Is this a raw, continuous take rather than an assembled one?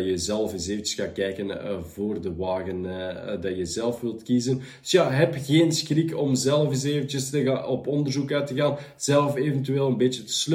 yes; 0 cuts

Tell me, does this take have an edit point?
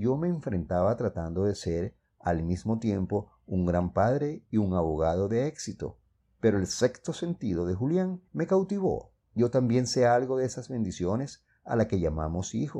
yes; 3 cuts; at 6.2 s, 8.3 s, 9.2 s

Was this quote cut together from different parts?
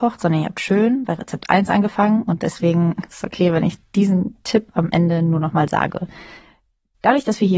no; 0 cuts

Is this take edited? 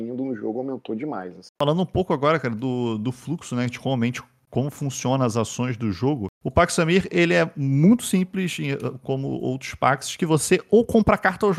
yes; 2 cuts; at 1.6 s, 6.3 s

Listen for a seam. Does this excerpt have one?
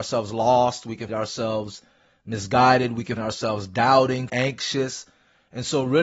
yes; 3 cuts; at 1.1 s, 3.2 s, 4.3 s

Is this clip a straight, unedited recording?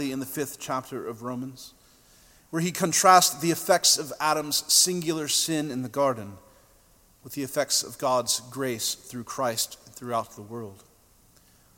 yes; 0 cuts

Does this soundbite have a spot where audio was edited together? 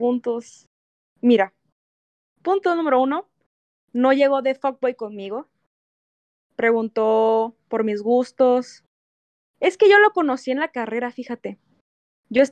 no; 0 cuts

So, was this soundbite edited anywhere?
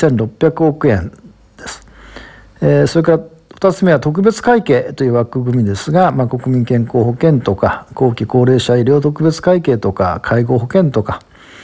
no; 0 cuts

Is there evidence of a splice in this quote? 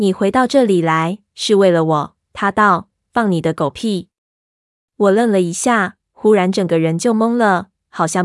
no; 0 cuts

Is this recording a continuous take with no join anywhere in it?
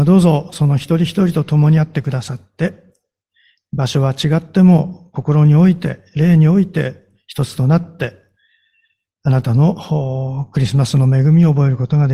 yes; 0 cuts

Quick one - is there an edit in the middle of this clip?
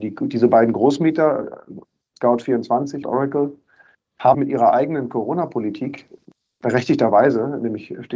yes; 2 cuts; at 3.0 s, 4.3 s

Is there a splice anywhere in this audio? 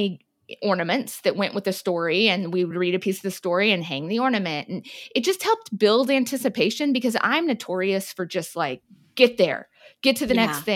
no; 0 cuts

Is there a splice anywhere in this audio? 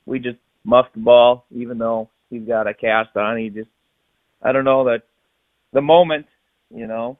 no; 0 cuts

